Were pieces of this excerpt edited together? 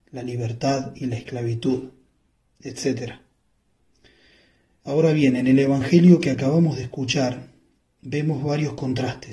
no; 0 cuts

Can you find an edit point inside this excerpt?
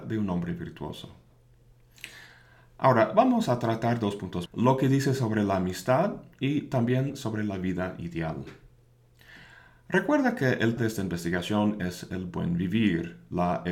yes; 2 cuts; at 4.5 s, 10.8 s

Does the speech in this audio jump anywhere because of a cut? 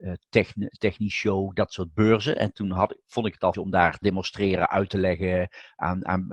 yes; 2 cuts; at 3.5 s, 4.0 s

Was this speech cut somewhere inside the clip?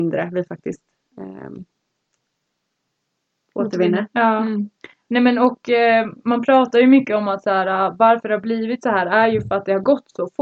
no; 0 cuts

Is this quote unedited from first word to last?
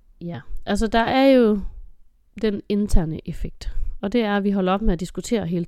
yes; 0 cuts

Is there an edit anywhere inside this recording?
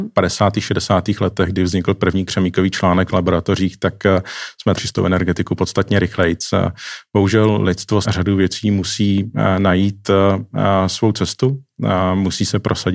yes; 3 cuts; at 3.1 s, 4.8 s, 8.0 s

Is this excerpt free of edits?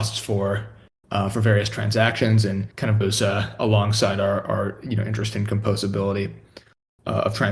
no; 1 cut; at 2.7 s

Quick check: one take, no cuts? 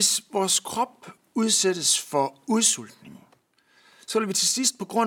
yes; 0 cuts

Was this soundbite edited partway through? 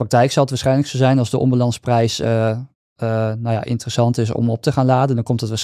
no; 0 cuts

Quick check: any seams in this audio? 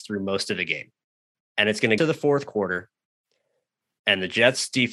yes; 2 cuts; at 1.3 s, 2.0 s

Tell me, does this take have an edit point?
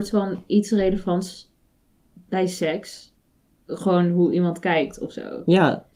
no; 0 cuts

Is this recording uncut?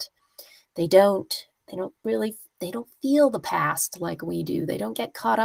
no; 1 cut; at 2.0 s

